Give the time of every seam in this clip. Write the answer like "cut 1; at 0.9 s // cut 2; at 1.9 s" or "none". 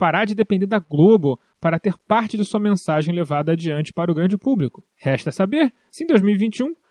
cut 1; at 4.9 s